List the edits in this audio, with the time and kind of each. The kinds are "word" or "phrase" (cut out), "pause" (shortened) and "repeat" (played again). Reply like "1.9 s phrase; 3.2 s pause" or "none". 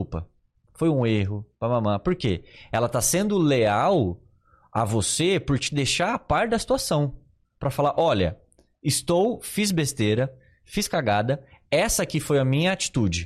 none